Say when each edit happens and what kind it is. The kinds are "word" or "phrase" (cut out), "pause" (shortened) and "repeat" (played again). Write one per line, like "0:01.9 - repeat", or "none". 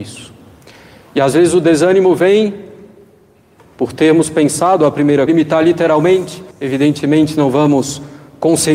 0:05.3 - phrase
0:06.5 - pause